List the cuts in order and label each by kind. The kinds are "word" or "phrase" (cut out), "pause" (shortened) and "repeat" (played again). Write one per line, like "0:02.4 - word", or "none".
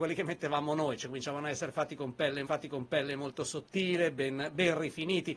0:02.5 - repeat